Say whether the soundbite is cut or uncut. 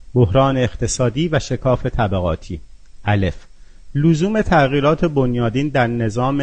uncut